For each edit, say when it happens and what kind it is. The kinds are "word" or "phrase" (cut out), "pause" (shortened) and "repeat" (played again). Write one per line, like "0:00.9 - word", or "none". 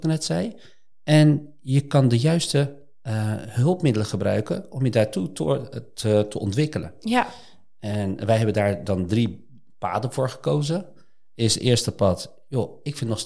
none